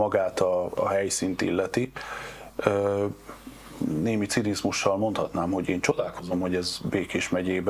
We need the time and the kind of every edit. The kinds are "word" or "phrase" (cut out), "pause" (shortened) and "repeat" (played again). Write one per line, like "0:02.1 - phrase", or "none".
none

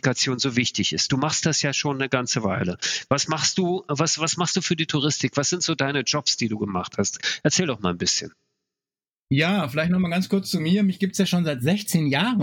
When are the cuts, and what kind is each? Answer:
none

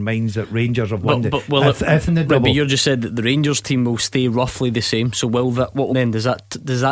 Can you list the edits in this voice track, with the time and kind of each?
0:02.1 - word
0:05.9 - phrase

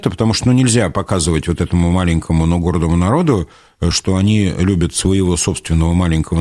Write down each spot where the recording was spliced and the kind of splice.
none

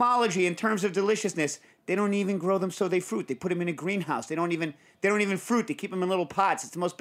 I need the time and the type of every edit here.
none

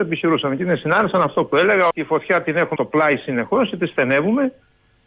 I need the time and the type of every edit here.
0:01.9 - word
0:02.8 - word

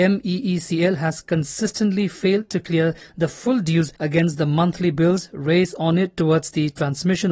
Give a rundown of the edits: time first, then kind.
0:04.0 - pause

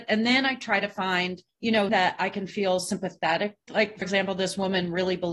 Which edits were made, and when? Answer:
0:01.5 - pause
0:01.9 - word
0:03.7 - word
0:04.0 - word

